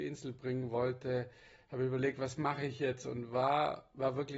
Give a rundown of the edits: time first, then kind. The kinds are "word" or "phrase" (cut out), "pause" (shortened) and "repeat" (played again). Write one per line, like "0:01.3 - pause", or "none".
none